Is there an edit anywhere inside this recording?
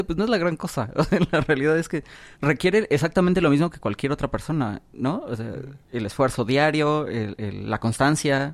yes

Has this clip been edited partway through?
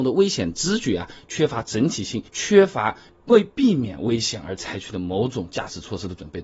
yes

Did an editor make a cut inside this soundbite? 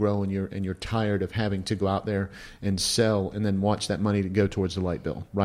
no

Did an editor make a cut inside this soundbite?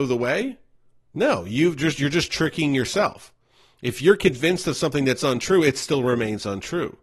no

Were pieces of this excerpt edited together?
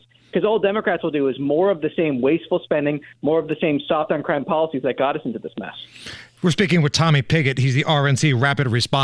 no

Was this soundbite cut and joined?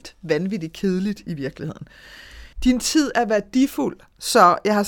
yes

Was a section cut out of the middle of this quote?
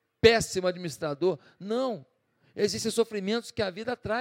no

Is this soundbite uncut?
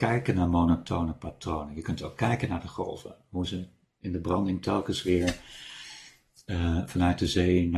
yes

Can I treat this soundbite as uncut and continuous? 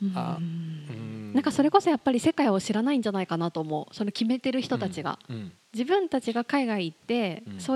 yes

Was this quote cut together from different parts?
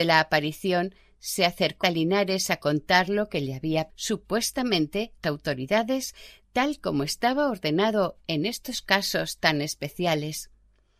yes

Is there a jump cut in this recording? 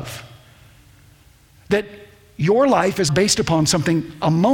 yes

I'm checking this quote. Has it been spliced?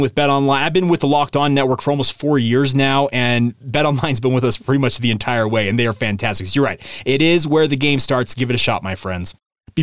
no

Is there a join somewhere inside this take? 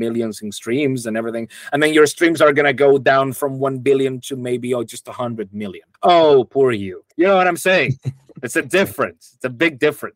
yes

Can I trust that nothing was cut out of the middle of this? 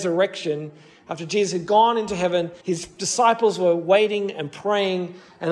no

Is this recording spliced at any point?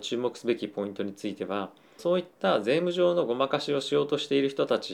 yes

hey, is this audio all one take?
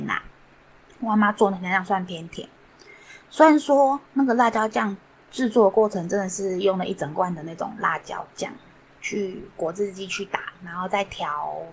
no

